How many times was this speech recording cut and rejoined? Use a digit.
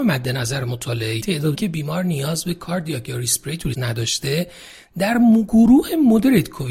3